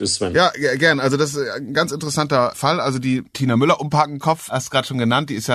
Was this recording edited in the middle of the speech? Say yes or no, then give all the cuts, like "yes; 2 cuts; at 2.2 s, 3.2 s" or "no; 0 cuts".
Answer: no; 0 cuts